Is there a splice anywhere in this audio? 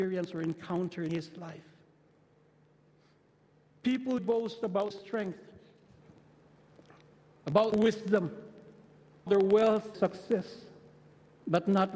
yes; 6 cuts; at 1.1 s, 4.2 s, 4.9 s, 7.7 s, 9.3 s, 9.9 s

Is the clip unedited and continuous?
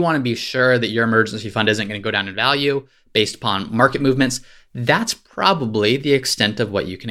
yes; 0 cuts

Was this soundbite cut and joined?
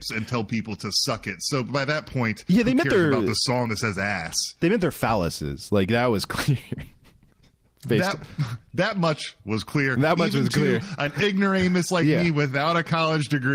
no; 0 cuts

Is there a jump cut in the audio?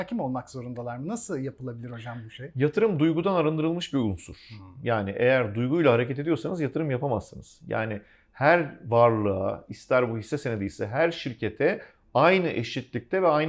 no; 0 cuts

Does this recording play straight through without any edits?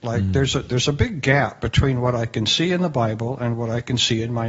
yes; 0 cuts

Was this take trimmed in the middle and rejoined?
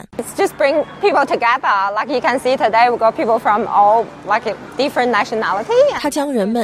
no; 0 cuts

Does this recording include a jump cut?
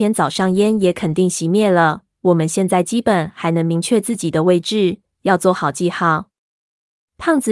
no; 0 cuts

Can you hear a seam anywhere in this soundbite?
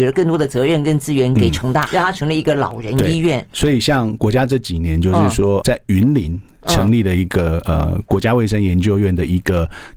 yes; 2 cuts; at 1.9 s, 5.6 s

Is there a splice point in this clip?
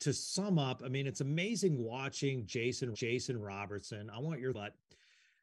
yes; 2 cuts; at 2.9 s, 4.5 s

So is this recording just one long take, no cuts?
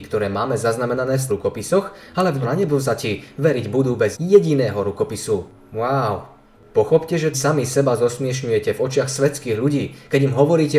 no; 4 cuts; at 1.3 s, 2.4 s, 4.1 s, 7.3 s

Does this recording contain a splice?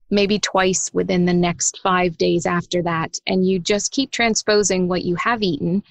no; 0 cuts

